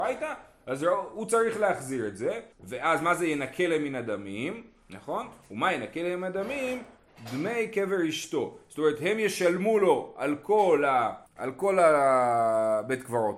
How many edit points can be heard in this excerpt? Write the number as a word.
two